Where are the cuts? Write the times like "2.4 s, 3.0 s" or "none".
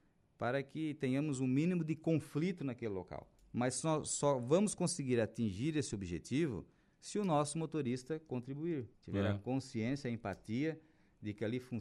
3.4 s, 8.9 s

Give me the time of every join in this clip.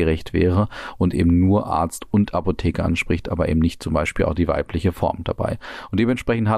none

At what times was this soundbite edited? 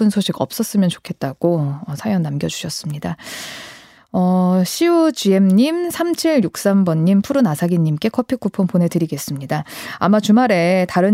none

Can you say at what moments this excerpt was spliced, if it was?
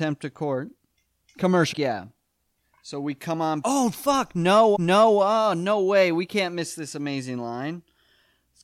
1.7 s, 3.6 s, 4.7 s

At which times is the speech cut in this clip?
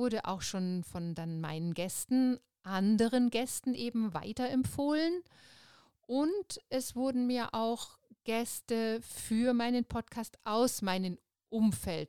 none

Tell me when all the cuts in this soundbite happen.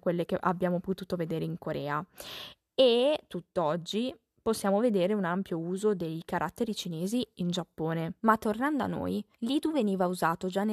8.2 s, 9.3 s

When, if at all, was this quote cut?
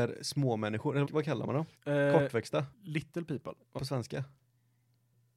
1.0 s, 1.7 s, 2.7 s, 3.8 s

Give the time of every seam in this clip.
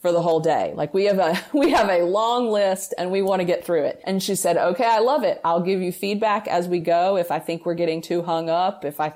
none

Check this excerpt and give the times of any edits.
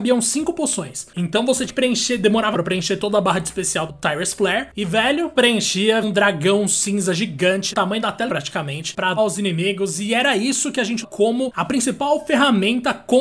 1.7 s, 2.5 s, 3.9 s, 5.4 s, 6.0 s, 7.7 s, 8.3 s, 9.2 s, 11.0 s

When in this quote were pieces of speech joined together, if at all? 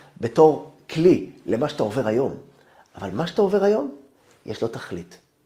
none

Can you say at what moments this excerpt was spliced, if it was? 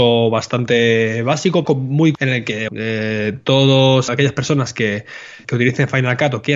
1.6 s, 2.1 s, 2.7 s, 4.1 s, 5.4 s

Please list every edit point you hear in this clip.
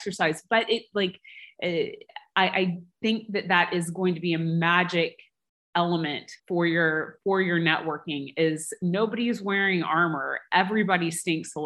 6.4 s

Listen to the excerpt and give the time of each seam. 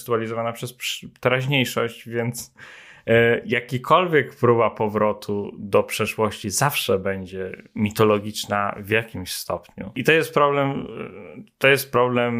none

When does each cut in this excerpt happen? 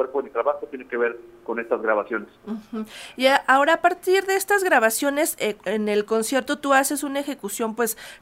2.4 s

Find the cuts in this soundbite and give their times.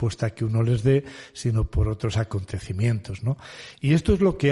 none

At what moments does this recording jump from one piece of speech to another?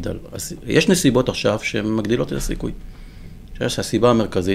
none

